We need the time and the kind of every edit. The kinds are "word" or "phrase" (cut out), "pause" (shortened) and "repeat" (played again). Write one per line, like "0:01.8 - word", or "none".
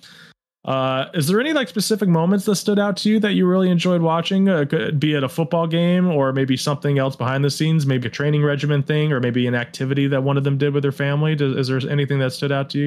0:08.0 - word

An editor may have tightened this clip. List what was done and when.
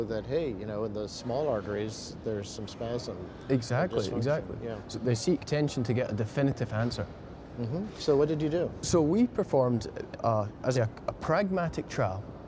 0:04.9 - word
0:05.4 - word
0:10.1 - word
0:10.7 - word

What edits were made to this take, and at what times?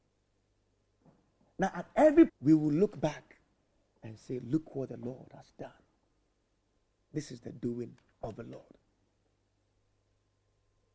0:02.3 - phrase

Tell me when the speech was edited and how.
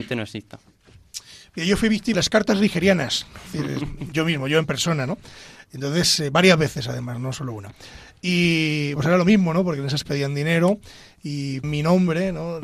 0:02.1 - word
0:03.5 - word
0:04.1 - word
0:09.0 - word
0:10.0 - word
0:11.6 - word

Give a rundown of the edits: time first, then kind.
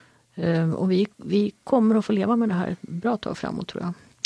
0:01.1 - pause

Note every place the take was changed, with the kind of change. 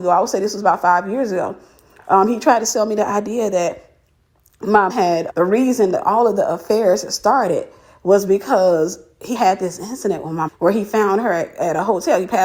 0:04.9 - word
0:05.3 - word
0:09.3 - word
0:10.5 - word

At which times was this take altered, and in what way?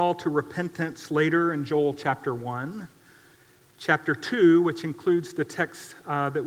none

